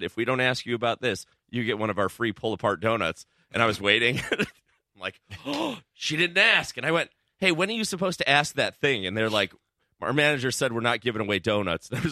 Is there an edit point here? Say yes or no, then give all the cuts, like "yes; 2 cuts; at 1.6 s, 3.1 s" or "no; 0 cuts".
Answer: no; 0 cuts